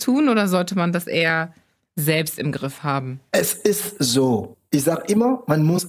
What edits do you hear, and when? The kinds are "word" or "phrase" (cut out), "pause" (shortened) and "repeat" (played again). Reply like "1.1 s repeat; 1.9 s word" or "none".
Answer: none